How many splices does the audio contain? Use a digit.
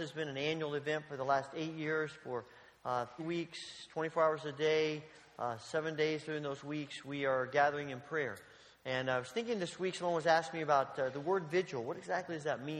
1